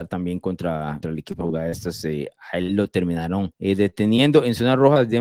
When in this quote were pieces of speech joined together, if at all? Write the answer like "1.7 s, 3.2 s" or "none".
1.0 s, 1.4 s, 3.5 s